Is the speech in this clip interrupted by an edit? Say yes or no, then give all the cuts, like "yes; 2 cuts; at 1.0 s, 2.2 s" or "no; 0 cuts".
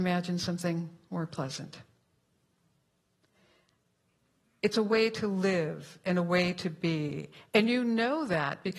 no; 0 cuts